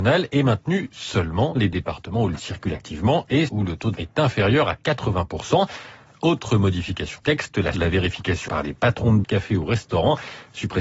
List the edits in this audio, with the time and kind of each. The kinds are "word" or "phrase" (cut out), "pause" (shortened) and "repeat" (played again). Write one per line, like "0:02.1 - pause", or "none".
0:01.6 - word
0:02.4 - word
0:03.5 - word
0:03.9 - word
0:07.2 - word
0:07.7 - word
0:08.5 - word
0:09.2 - word